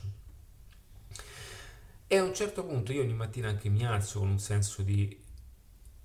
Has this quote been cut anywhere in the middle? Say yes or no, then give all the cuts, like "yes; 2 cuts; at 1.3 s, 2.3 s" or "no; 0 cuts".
no; 0 cuts